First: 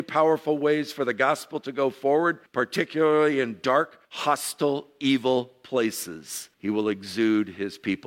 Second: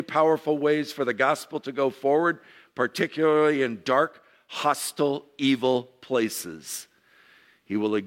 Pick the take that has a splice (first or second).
first